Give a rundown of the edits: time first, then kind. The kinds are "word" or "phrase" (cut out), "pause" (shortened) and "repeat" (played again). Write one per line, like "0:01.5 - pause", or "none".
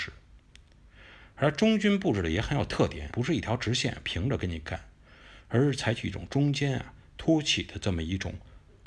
0:03.1 - word